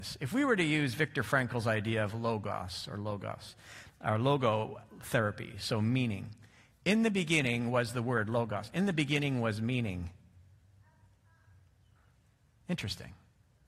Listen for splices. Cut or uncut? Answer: uncut